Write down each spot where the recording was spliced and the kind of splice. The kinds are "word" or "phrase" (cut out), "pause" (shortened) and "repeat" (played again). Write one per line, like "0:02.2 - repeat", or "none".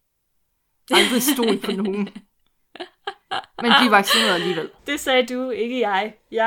0:04.8 - pause